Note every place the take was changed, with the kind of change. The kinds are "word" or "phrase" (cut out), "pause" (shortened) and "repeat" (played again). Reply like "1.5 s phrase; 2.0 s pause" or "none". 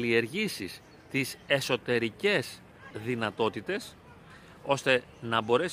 2.9 s word